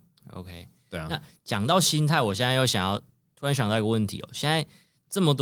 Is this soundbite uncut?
yes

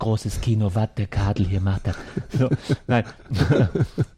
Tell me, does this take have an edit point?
no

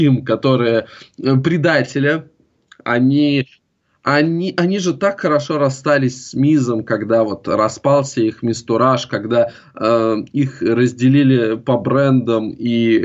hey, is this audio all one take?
yes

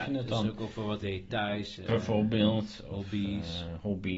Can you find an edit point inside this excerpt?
yes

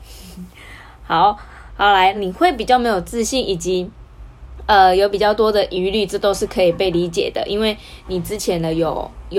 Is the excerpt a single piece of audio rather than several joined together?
no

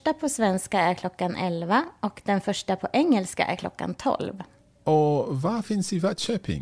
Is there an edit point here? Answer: no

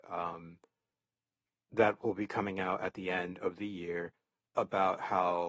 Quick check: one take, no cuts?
yes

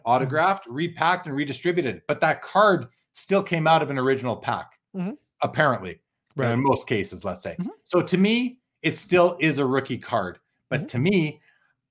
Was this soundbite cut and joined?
no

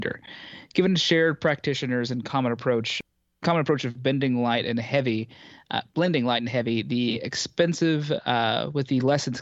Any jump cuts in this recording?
no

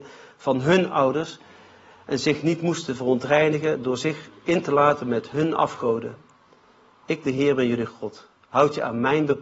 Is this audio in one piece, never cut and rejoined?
yes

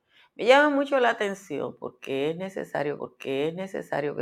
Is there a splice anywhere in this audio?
yes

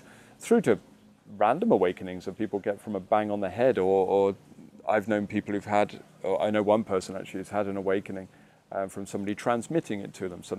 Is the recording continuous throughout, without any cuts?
yes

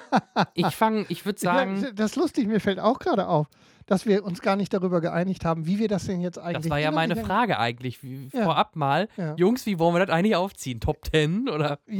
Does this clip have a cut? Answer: no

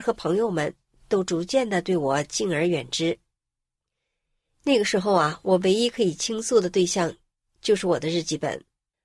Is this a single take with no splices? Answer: yes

